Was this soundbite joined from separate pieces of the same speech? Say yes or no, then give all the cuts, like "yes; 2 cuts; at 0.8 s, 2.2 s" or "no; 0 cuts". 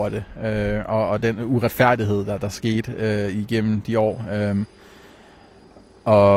no; 0 cuts